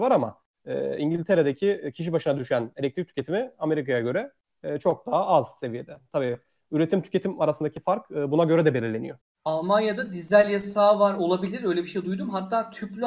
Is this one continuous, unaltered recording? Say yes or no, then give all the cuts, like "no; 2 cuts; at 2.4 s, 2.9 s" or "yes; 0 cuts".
yes; 0 cuts